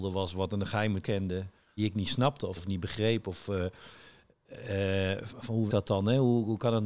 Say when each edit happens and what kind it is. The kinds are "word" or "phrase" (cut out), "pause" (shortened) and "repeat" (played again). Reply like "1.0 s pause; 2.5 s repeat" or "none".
1.0 s word; 1.8 s word; 2.6 s word; 5.7 s word